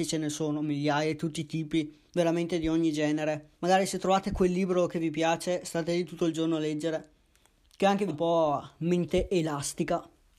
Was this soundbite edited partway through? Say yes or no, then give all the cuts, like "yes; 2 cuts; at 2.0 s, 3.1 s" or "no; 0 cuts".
yes; 3 cuts; at 2.1 s, 3.5 s, 8.1 s